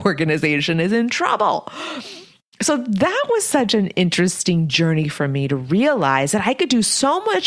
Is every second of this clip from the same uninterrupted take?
yes; 0 cuts

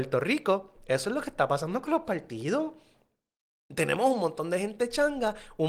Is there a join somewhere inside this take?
no; 0 cuts

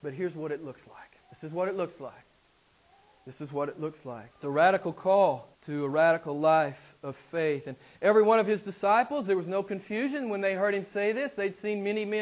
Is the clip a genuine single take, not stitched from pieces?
no; 3 cuts; at 1.2 s, 4.3 s, 5.5 s

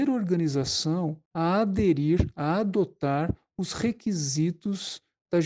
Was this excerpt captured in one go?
no; 1 cut; at 1.3 s

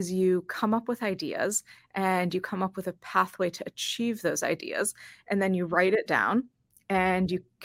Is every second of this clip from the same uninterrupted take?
yes; 0 cuts

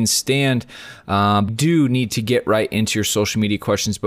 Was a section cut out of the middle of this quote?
yes; 1 cut; at 1.5 s

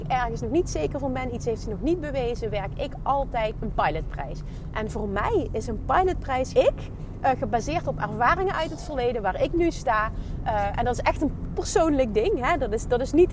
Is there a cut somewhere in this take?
yes; 3 cuts; at 3.6 s, 6.5 s, 11.5 s

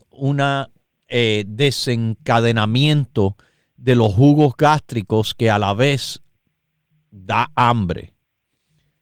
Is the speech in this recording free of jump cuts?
yes; 0 cuts

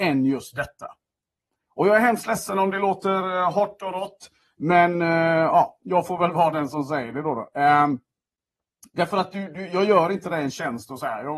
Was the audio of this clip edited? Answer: no; 0 cuts

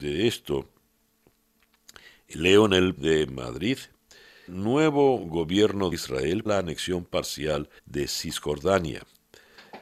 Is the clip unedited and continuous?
no; 5 cuts; at 3.0 s, 4.5 s, 5.9 s, 6.5 s, 7.8 s

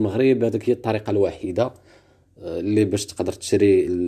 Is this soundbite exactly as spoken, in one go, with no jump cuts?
yes; 0 cuts

